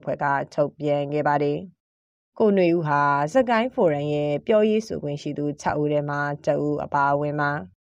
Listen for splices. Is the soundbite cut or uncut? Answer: uncut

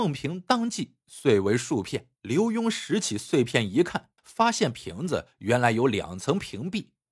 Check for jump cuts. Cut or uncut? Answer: cut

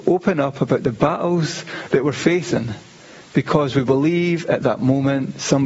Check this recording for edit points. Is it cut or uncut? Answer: uncut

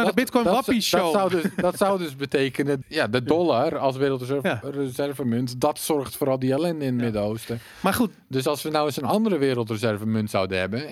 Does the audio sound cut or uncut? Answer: cut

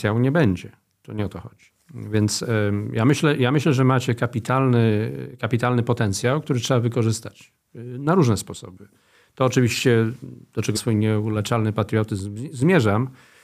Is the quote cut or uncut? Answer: cut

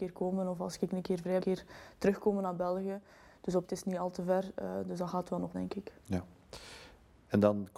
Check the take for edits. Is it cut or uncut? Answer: cut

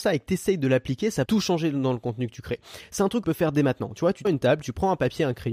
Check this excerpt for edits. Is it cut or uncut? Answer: cut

